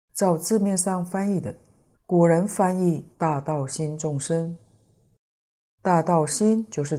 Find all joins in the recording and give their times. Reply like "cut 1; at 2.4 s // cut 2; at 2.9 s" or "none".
cut 1; at 1.9 s // cut 2; at 3.1 s

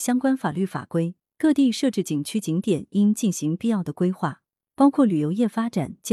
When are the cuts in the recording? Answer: none

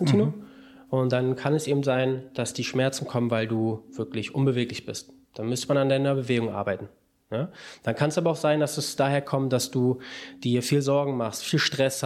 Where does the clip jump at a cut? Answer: none

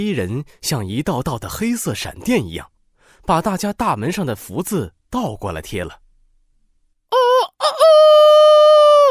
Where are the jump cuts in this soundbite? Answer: none

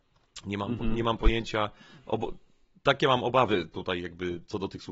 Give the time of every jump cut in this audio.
none

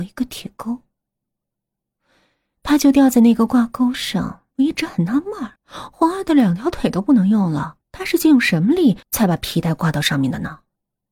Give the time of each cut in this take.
cut 1; at 4.5 s // cut 2; at 5.6 s // cut 3; at 7.8 s // cut 4; at 9.0 s

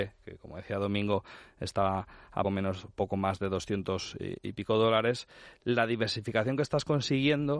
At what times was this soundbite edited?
cut 1; at 2.4 s

